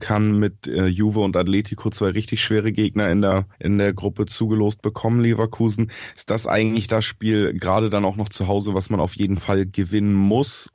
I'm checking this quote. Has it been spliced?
yes; 1 cut; at 3.5 s

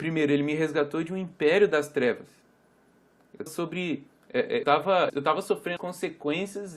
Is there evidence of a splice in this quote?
yes; 4 cuts; at 3.5 s, 4.6 s, 5.1 s, 5.8 s

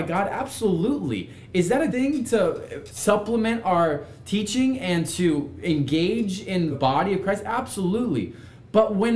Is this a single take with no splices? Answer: no; 3 cuts; at 1.9 s, 2.9 s, 6.7 s

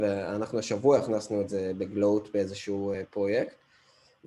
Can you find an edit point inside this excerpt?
no; 0 cuts

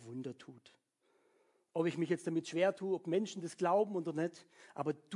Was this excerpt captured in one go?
yes; 0 cuts

